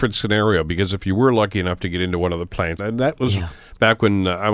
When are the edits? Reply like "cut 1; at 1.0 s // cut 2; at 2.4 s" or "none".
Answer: cut 1; at 2.8 s